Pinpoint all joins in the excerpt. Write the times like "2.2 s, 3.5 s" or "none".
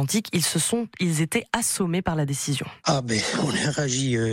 2.8 s